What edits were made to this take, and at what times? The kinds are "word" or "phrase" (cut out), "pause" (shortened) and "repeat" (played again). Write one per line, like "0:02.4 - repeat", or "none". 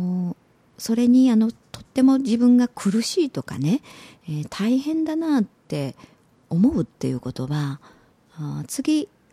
none